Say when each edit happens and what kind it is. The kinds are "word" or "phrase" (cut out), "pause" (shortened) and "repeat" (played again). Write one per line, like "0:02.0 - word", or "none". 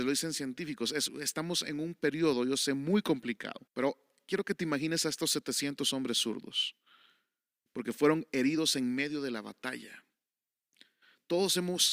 0:03.7 - pause